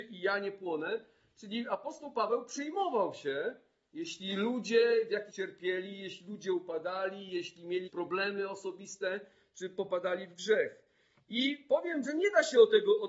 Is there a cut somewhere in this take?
yes; 3 cuts; at 5.3 s, 7.9 s, 12.0 s

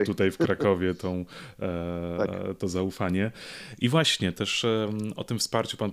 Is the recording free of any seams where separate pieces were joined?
yes; 0 cuts

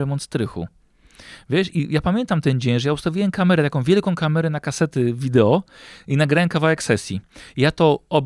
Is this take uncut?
yes; 0 cuts

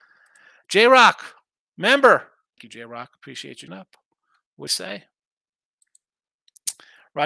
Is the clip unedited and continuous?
no; 3 cuts; at 2.6 s, 3.7 s, 4.7 s

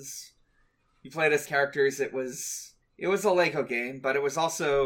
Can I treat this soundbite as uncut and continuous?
no; 2 cuts; at 1.4 s, 2.8 s

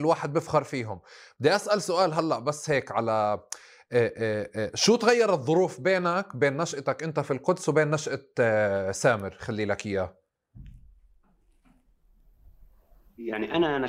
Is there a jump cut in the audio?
no; 0 cuts

